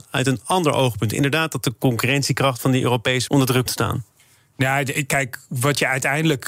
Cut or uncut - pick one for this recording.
cut